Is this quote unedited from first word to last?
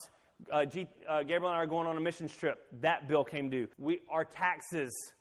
no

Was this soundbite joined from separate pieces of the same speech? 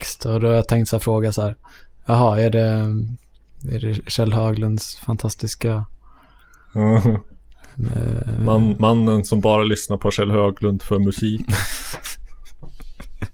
no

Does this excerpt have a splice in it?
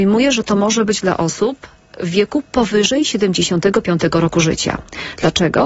no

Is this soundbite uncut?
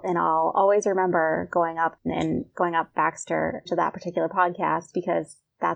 no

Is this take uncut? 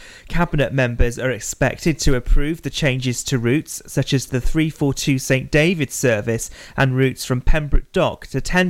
yes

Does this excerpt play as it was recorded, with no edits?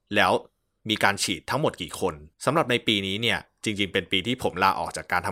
no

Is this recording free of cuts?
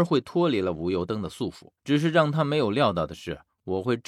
no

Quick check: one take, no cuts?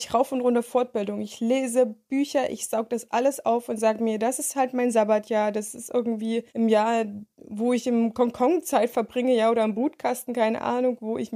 no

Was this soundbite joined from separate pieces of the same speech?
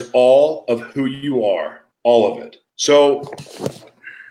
yes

